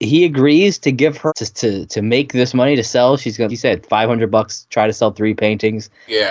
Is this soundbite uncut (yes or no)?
no